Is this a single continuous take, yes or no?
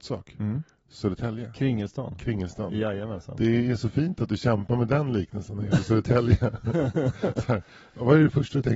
yes